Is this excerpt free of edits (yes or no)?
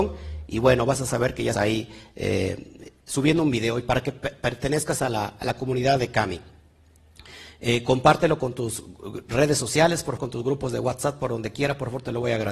no